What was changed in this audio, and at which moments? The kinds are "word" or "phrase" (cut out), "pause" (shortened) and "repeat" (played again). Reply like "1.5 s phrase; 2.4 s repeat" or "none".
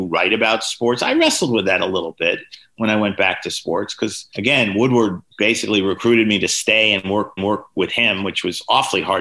5.3 s pause; 7.4 s repeat